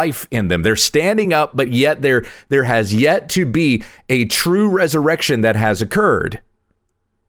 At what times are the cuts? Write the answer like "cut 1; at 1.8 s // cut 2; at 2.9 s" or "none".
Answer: none